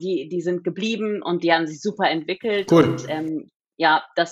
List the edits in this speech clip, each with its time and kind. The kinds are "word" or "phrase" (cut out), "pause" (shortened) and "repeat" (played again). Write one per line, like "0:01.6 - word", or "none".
none